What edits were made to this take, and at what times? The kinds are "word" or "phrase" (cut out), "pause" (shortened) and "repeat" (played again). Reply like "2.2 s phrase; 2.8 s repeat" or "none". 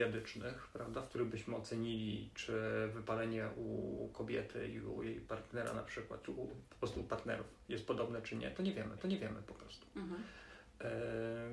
9.0 s repeat